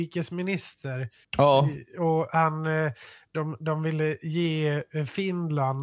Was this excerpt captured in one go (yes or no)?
yes